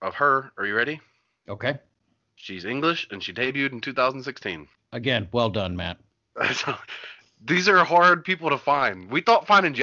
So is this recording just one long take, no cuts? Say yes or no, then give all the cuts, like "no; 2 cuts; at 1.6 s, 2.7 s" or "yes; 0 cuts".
yes; 0 cuts